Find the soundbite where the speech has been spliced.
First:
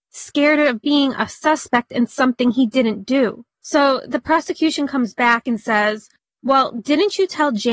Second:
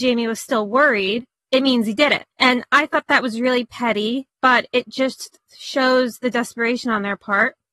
second; 3 cuts; at 2.3 s, 4.3 s, 5.5 s

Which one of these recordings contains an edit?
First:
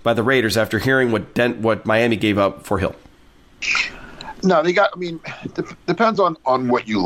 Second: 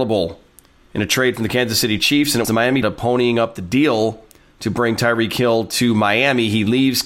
second; 2 cuts; at 2.4 s, 2.8 s

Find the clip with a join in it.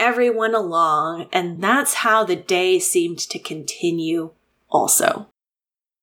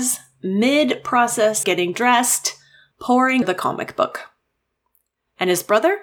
second; 3 cuts; at 1.6 s, 2.9 s, 3.4 s

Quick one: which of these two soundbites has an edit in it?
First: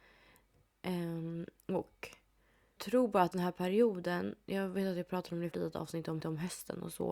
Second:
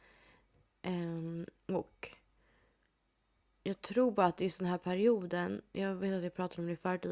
first; 4 cuts; at 2.8 s, 3.3 s, 5.5 s, 6.2 s

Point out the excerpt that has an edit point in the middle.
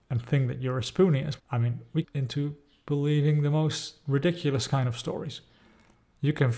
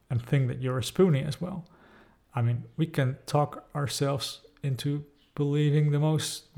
first; 2 cuts; at 1.4 s, 2.0 s

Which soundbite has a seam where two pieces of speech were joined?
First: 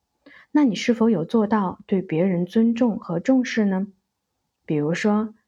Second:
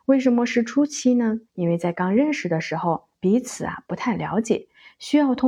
second; 2 cuts; at 1.5 s, 3.1 s

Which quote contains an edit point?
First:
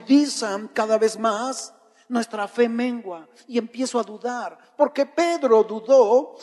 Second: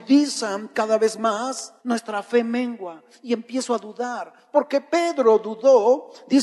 second; 1 cut; at 1.8 s

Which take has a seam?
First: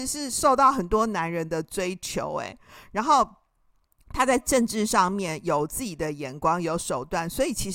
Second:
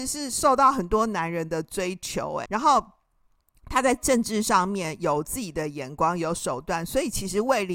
second; 1 cut; at 2.5 s

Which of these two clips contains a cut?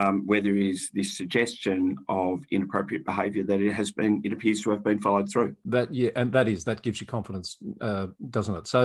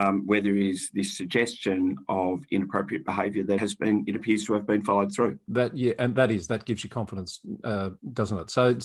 second; 1 cut; at 3.6 s

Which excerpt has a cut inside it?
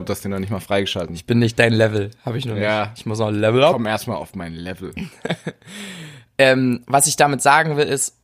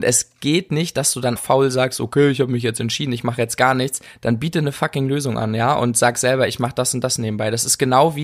second; 1 cut; at 1.4 s

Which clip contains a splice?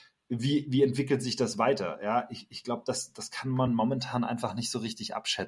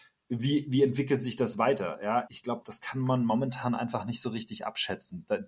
second; 2 cuts; at 2.3 s, 2.6 s

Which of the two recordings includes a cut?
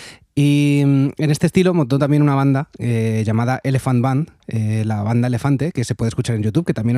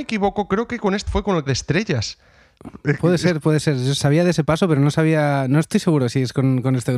second; 3 cuts; at 1.1 s, 1.5 s, 4.0 s

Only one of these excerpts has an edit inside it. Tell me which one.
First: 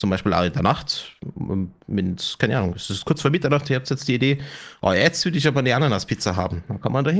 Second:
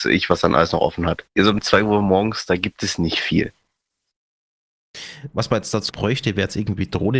second; 2 cuts; at 1.3 s, 5.9 s

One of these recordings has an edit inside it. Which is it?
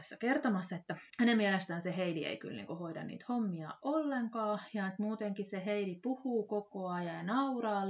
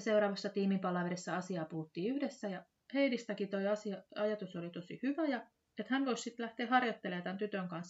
first; 1 cut; at 1.1 s

